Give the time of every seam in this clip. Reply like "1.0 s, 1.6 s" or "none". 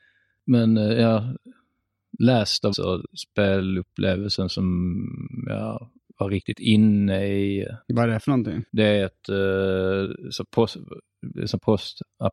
2.7 s, 6.0 s, 7.8 s, 8.7 s